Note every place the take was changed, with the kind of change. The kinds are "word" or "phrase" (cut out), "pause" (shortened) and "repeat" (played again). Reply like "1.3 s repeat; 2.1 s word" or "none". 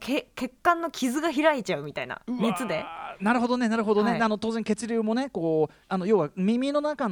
5.8 s pause

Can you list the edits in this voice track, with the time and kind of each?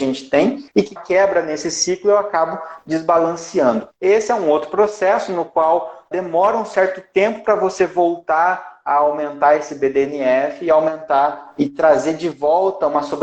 1.0 s phrase; 6.1 s word

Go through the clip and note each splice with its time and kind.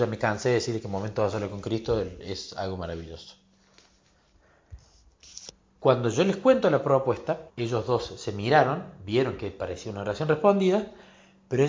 7.5 s pause

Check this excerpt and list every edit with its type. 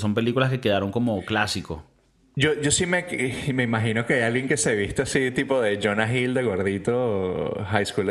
none

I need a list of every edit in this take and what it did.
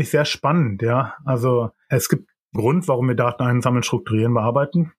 2.6 s word

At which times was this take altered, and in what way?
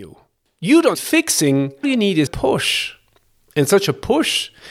0.9 s word; 1.8 s word; 2.3 s word

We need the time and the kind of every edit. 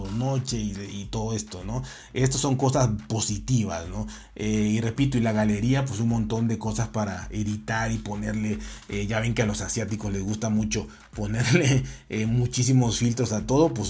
none

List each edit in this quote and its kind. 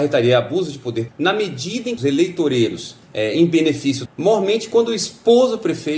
1.1 s word; 2.0 s phrase; 3.0 s pause; 4.1 s phrase

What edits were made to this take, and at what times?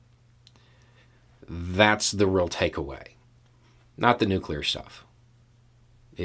none

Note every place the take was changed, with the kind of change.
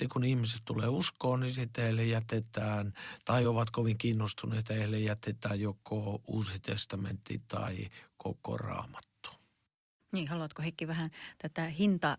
none

